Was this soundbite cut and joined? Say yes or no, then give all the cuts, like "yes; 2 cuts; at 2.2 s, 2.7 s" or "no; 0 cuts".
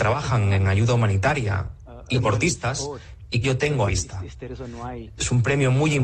yes; 3 cuts; at 2.1 s, 3.4 s, 3.9 s